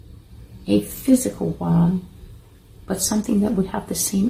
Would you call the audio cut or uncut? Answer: uncut